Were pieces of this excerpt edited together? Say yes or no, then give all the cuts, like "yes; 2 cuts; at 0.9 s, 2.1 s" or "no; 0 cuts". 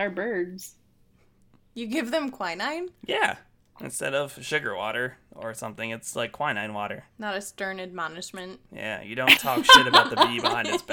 yes; 2 cuts; at 8.7 s, 9.4 s